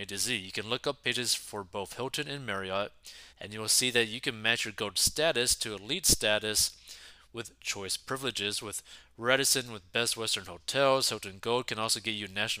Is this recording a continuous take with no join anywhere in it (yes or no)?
no